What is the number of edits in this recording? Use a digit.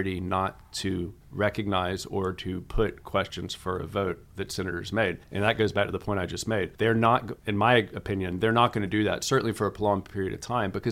4